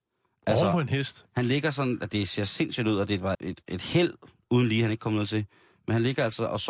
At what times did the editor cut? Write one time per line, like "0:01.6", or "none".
0:03.3